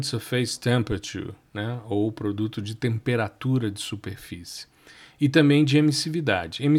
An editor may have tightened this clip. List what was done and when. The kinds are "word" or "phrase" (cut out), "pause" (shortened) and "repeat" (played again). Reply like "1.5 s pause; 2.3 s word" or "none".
none

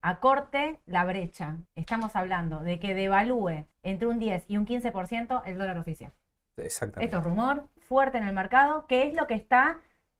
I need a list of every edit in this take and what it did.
1.7 s pause; 3.7 s pause; 7.8 s word

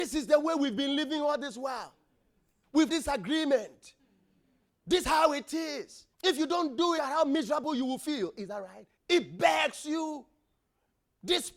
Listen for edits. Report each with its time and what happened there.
2.9 s word; 5.0 s word; 6.1 s pause; 7.0 s phrase; 9.0 s pause

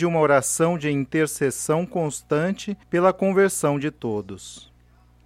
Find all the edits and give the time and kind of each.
2.8 s pause

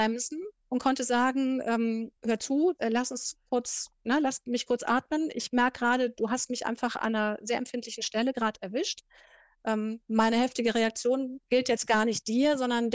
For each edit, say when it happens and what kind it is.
2.2 s pause

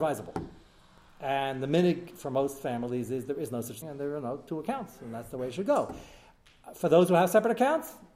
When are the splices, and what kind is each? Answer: 3.8 s word

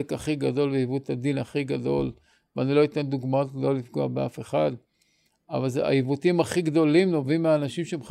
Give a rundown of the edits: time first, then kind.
none

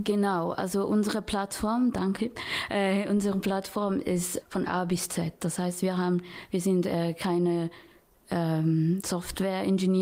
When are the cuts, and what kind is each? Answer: 2.2 s phrase; 4.4 s word

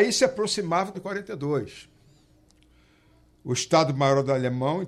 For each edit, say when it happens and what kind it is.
0.9 s word

